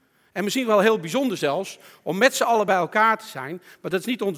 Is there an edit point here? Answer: no; 0 cuts

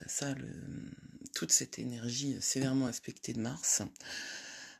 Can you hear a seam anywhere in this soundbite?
no; 0 cuts

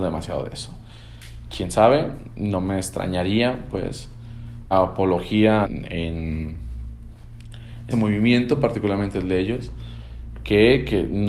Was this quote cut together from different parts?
yes; 3 cuts; at 4.7 s, 5.6 s, 7.9 s

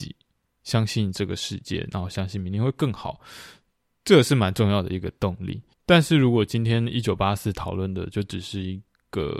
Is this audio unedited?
no; 1 cut; at 5.7 s

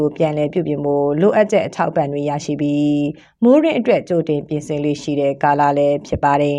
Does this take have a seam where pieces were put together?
no; 0 cuts

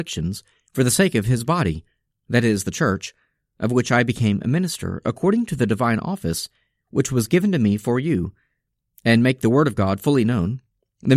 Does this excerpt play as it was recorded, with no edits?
yes; 0 cuts

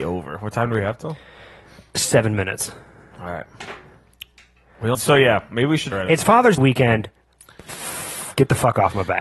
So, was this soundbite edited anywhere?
yes; 3 cuts; at 4.9 s, 5.9 s, 6.6 s

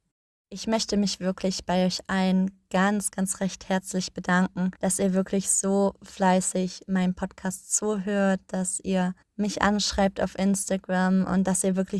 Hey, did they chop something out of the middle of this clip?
yes; 2 cuts; at 4.7 s, 9.2 s

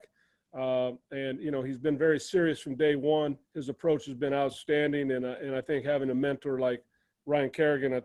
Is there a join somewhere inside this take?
yes; 1 cut; at 3.4 s

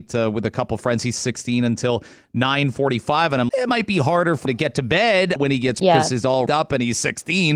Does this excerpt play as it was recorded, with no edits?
no; 5 cuts; at 3.5 s, 4.5 s, 5.4 s, 5.8 s, 6.5 s

